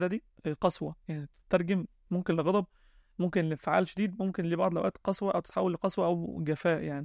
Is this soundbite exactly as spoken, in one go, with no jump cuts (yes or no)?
yes